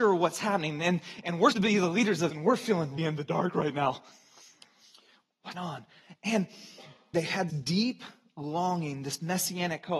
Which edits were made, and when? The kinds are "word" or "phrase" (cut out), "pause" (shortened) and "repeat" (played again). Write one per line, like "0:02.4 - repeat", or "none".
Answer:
0:01.5 - word
0:02.3 - word
0:03.0 - word
0:05.5 - word
0:07.1 - word
0:07.5 - word